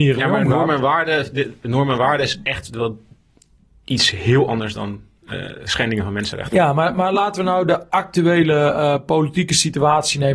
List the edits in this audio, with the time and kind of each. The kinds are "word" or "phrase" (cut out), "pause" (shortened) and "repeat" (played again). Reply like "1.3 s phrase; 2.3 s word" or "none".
none